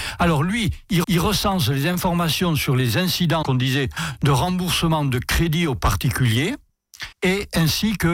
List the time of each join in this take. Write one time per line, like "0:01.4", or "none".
0:01.0
0:03.4
0:07.1